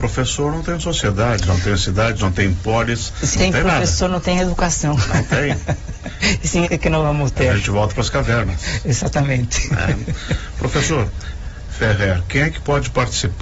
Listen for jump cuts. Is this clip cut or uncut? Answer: cut